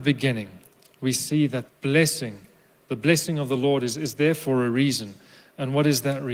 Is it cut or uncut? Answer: cut